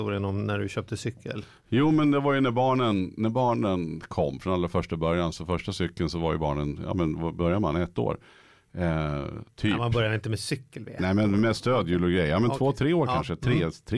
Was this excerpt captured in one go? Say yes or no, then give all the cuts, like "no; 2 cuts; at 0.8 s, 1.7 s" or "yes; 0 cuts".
yes; 0 cuts